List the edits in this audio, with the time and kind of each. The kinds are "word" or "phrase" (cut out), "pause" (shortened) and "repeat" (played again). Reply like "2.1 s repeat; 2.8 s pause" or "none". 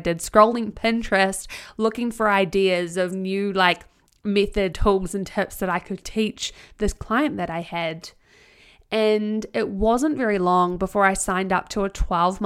4.7 s word